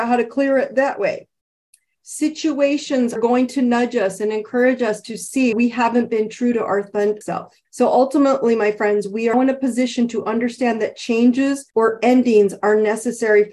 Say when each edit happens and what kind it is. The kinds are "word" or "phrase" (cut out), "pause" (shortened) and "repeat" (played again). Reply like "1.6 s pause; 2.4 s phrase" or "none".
3.2 s word; 5.5 s word; 7.2 s phrase; 7.6 s pause; 9.3 s word; 11.7 s pause